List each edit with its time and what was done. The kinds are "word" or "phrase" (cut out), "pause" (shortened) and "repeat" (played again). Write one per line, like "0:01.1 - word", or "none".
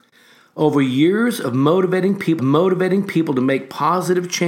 0:02.4 - repeat